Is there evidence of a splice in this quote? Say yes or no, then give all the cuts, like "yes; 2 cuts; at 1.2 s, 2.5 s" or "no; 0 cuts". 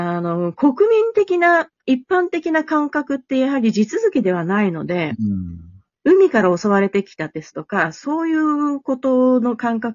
no; 0 cuts